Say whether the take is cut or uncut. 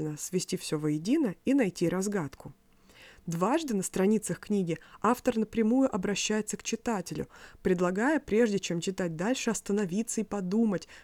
uncut